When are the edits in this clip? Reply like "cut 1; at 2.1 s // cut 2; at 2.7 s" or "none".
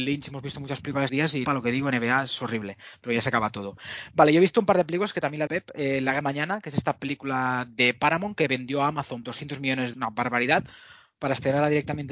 cut 1; at 1.1 s // cut 2; at 1.4 s // cut 3; at 5.5 s // cut 4; at 6.2 s // cut 5; at 9.2 s // cut 6; at 9.9 s